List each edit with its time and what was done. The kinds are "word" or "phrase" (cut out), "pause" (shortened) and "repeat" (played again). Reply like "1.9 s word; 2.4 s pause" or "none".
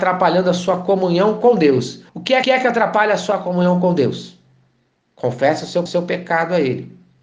2.1 s pause; 2.4 s repeat; 5.9 s repeat